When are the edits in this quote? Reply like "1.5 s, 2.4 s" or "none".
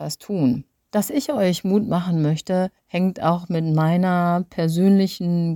2.8 s